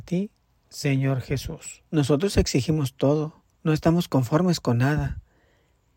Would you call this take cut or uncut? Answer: cut